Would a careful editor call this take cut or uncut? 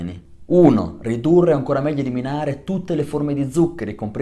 uncut